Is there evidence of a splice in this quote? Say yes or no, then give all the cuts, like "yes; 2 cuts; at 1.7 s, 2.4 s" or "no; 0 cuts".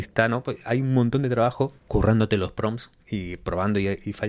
no; 0 cuts